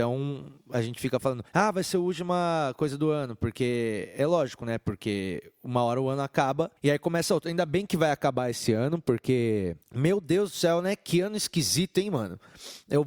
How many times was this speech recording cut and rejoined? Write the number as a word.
three